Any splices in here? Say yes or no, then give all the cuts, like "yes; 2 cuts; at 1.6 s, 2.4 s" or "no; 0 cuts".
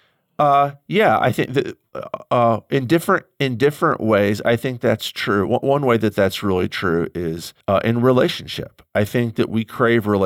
yes; 1 cut; at 7.6 s